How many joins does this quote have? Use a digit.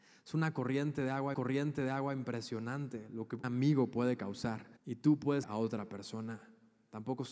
4